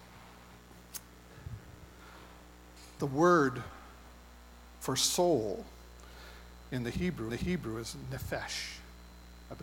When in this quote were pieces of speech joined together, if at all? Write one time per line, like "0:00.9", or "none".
0:03.0
0:07.3